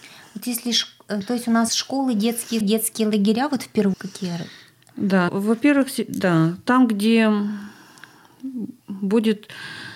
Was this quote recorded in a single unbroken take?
no; 5 cuts; at 1.7 s, 2.6 s, 3.9 s, 5.3 s, 8.8 s

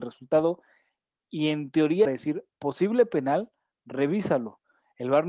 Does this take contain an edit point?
yes; 2 cuts; at 2.0 s, 2.5 s

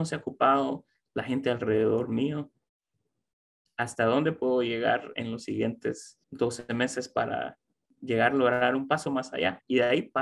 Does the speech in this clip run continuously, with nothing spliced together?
no; 1 cut; at 6.2 s

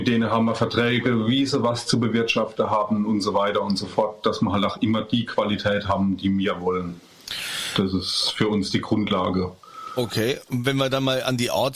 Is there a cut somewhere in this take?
no; 0 cuts

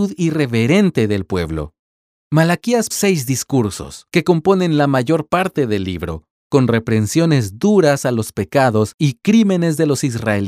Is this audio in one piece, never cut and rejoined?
no; 1 cut; at 2.9 s

